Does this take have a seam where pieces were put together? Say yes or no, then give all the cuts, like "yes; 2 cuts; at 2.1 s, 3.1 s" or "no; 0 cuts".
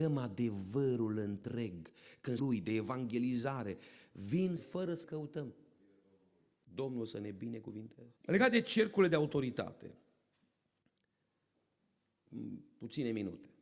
yes; 4 cuts; at 2.4 s, 4.6 s, 5.0 s, 8.2 s